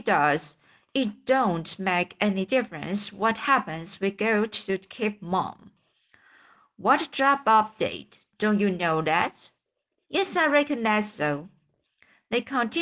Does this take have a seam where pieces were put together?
no; 0 cuts

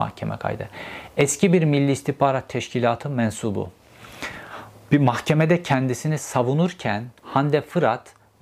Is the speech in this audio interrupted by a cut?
yes; 1 cut; at 7.2 s

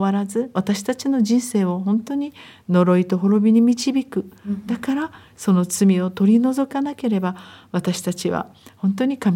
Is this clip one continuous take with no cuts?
yes; 0 cuts

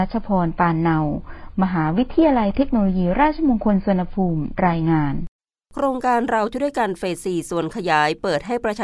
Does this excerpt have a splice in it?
no; 0 cuts

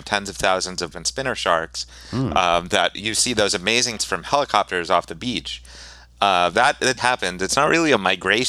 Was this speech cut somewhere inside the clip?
yes; 5 cuts; at 0.9 s, 3.0 s, 4.0 s, 6.5 s, 7.0 s

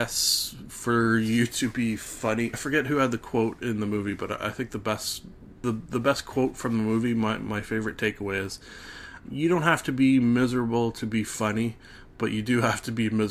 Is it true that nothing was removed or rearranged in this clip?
no; 3 cuts; at 2.5 s, 5.6 s, 9.3 s

